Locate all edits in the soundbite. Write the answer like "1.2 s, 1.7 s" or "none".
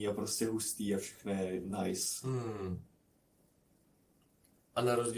none